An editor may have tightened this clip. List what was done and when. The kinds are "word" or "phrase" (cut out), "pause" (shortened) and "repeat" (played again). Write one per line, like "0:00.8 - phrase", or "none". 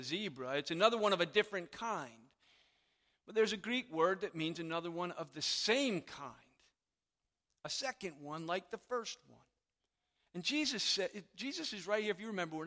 none